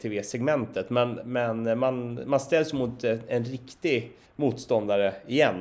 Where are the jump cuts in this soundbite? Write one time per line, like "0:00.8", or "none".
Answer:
0:04.3